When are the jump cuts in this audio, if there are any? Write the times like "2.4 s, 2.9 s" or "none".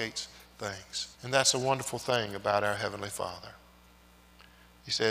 1.1 s